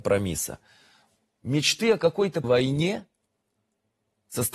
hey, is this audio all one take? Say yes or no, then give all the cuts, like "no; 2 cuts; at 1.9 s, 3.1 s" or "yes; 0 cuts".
no; 1 cut; at 2.4 s